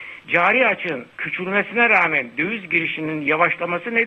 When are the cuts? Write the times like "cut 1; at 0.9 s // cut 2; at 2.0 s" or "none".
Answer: cut 1; at 1.1 s